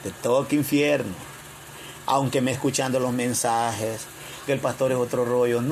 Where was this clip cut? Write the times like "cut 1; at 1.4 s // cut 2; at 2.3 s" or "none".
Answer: cut 1; at 2.5 s // cut 2; at 4.5 s

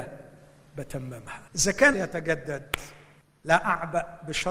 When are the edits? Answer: cut 1; at 1.5 s // cut 2; at 1.9 s // cut 3; at 3.2 s

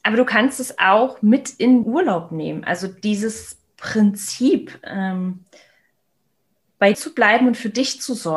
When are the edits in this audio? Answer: cut 1; at 1.8 s // cut 2; at 6.9 s

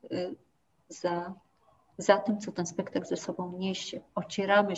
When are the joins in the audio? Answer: none

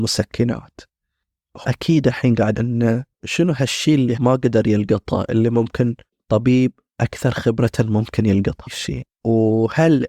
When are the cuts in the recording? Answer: cut 1; at 1.6 s // cut 2; at 2.5 s // cut 3; at 3.1 s // cut 4; at 4.2 s // cut 5; at 6.1 s // cut 6; at 8.7 s

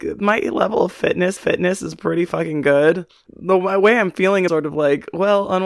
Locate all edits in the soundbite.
cut 1; at 1.4 s // cut 2; at 3.1 s // cut 3; at 4.5 s

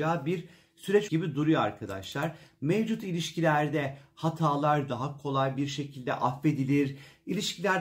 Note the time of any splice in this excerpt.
cut 1; at 1.1 s

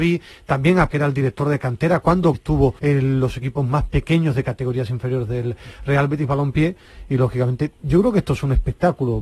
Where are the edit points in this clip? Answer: cut 1; at 0.9 s // cut 2; at 2.3 s // cut 3; at 2.8 s // cut 4; at 7.8 s

